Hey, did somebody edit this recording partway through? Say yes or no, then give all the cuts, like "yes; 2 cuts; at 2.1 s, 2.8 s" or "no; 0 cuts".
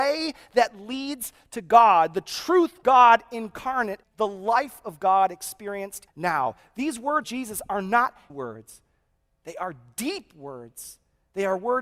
yes; 5 cuts; at 2.8 s, 4.0 s, 6.1 s, 7.2 s, 8.3 s